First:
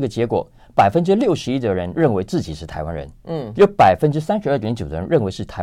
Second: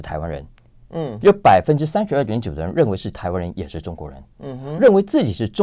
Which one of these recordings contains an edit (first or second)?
first